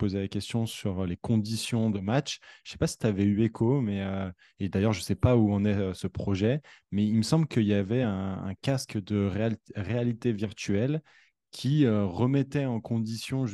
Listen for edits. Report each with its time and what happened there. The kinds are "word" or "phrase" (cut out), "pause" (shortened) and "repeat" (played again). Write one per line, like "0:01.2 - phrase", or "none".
none